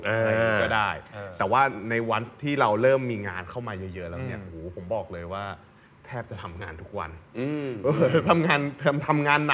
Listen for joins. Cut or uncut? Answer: uncut